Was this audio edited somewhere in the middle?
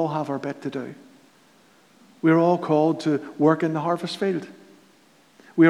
no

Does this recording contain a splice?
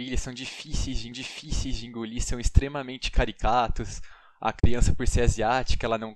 yes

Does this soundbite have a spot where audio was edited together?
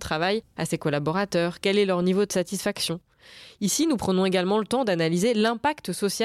no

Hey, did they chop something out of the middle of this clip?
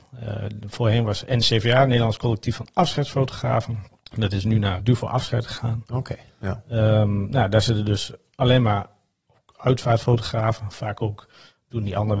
yes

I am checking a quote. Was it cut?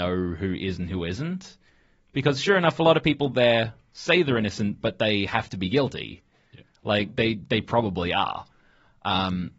no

